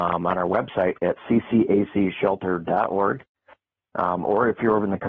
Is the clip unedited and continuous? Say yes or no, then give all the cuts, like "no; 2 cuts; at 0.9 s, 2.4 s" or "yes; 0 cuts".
yes; 0 cuts